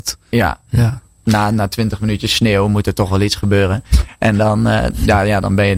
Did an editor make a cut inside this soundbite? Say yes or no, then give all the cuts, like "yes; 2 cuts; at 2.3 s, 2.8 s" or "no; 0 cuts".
no; 0 cuts